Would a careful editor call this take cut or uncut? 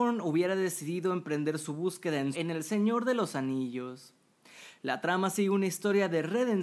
cut